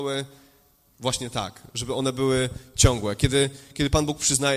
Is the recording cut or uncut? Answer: uncut